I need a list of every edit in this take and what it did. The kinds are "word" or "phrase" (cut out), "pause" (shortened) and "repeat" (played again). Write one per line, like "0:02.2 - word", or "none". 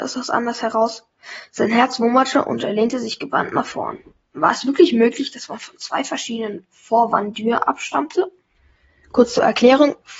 none